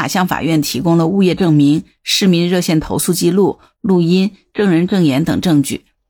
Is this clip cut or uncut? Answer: uncut